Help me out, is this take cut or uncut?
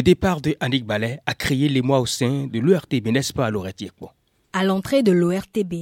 uncut